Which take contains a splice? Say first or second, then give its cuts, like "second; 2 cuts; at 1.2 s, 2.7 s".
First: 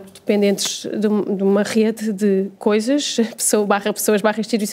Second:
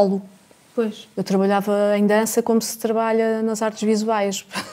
first; 1 cut; at 2.5 s